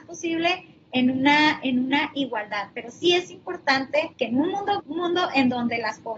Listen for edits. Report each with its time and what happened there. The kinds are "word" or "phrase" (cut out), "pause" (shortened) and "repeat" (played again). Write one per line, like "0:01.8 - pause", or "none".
0:04.1 - pause
0:04.8 - phrase